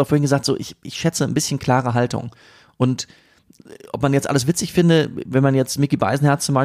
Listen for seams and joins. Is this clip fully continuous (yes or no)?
yes